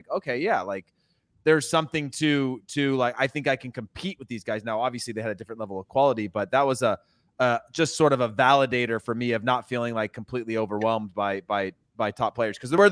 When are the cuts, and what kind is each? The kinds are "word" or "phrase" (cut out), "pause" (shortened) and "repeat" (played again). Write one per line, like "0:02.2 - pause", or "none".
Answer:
none